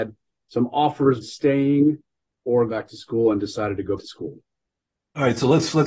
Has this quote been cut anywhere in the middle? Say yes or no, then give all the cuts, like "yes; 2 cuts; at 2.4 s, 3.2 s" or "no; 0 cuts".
yes; 3 cuts; at 1.2 s, 2.7 s, 4.0 s